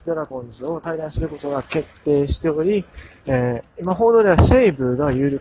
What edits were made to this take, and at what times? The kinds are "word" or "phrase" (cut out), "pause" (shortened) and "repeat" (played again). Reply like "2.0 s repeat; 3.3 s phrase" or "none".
3.7 s pause